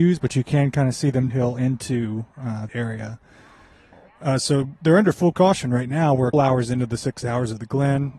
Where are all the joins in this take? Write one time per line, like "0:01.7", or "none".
0:01.3
0:02.7
0:05.3
0:06.3